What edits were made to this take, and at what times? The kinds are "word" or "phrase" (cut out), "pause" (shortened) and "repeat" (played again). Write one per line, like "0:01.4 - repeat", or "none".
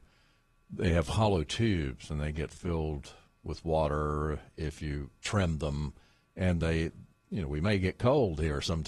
0:06.6 - word